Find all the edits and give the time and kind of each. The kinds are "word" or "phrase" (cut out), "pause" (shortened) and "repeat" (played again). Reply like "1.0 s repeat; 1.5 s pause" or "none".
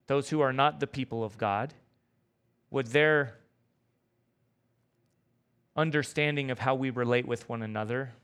none